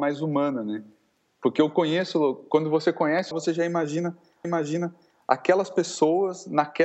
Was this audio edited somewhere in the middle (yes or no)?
yes